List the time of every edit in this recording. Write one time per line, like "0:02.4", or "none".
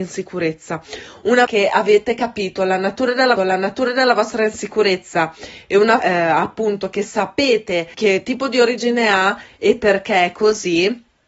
0:01.5
0:03.4
0:06.0
0:07.9